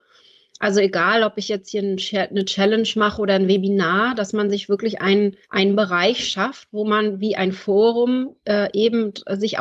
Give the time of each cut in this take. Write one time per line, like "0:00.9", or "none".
0:05.4
0:08.4